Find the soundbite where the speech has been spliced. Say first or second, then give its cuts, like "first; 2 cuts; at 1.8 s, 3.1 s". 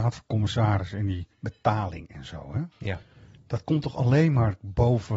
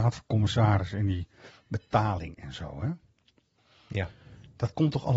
first; 2 cuts; at 1.3 s, 2.7 s